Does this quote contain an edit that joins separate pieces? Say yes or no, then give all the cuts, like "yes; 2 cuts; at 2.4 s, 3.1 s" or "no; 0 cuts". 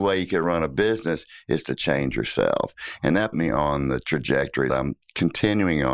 yes; 2 cuts; at 3.3 s, 4.7 s